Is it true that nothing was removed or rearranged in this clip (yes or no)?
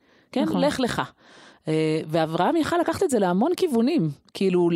yes